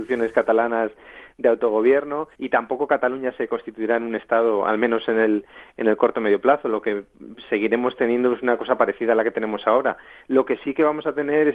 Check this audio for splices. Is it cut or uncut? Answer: cut